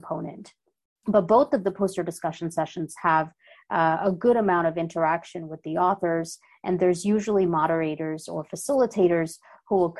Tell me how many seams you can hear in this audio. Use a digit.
0